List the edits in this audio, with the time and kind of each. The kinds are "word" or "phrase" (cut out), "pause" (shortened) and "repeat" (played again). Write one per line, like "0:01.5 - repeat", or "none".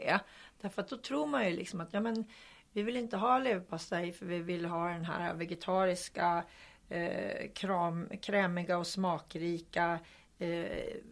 none

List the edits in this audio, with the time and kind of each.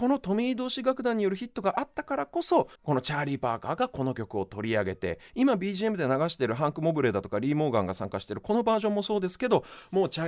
0:02.7 - pause

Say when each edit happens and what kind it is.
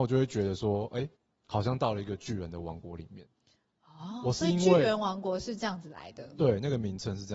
0:01.2 - pause

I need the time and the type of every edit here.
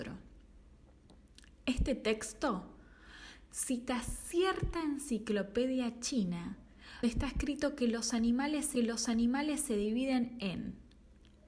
0:07.0 - word
0:08.8 - repeat

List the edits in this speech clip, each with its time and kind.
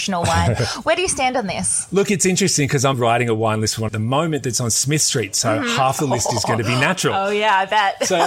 0:02.9 - word
0:03.9 - phrase

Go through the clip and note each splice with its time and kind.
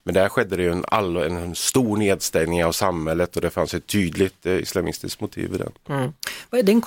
none

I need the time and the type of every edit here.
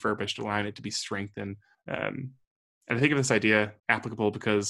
0:01.7 - pause
0:03.8 - phrase

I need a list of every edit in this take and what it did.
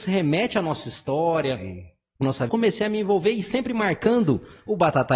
0:02.5 - phrase

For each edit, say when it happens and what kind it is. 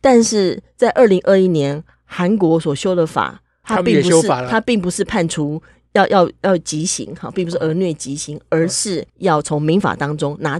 0:03.6 - word
0:09.1 - pause

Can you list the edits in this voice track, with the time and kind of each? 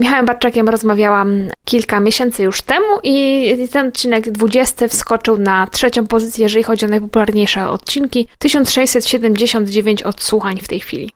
0:08.3 - pause

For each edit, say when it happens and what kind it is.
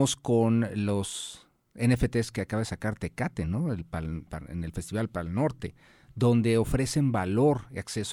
none

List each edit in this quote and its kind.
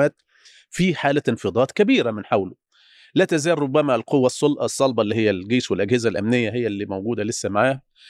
none

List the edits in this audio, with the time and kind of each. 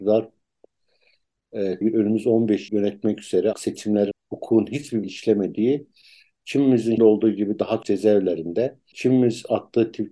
0:01.8 - word
0:02.7 - word
0:03.5 - word
0:04.1 - word
0:05.0 - word
0:07.0 - word
0:07.8 - word
0:08.9 - word

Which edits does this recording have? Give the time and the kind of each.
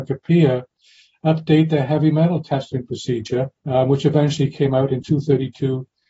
0:03.6 - pause
0:05.0 - word

